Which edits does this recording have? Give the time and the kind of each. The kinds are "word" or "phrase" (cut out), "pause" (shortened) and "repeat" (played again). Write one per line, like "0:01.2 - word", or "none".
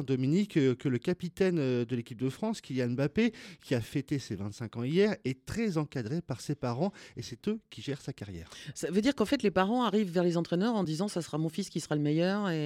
none